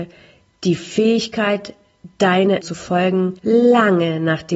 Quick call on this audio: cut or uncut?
cut